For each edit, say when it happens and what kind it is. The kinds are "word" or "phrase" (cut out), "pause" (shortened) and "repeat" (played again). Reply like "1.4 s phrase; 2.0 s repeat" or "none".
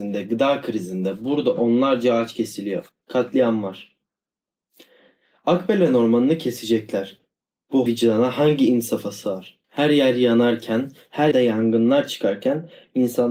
7.9 s word; 9.6 s pause; 11.3 s word